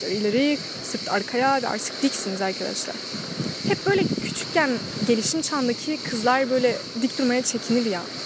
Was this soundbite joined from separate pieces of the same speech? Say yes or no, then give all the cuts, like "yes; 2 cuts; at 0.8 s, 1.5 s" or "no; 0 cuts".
no; 0 cuts